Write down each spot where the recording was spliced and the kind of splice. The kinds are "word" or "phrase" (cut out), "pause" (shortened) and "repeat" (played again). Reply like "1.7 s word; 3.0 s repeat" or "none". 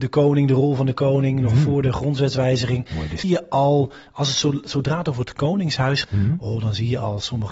3.2 s phrase; 6.0 s word